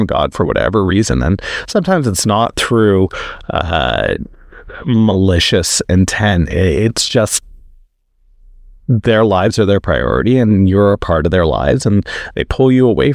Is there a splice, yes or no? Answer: no